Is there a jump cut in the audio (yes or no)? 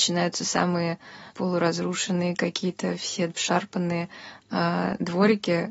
yes